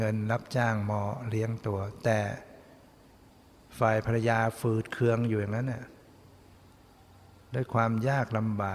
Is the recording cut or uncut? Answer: uncut